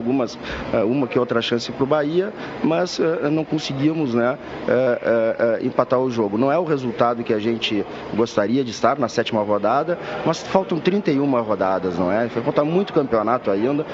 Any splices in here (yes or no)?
no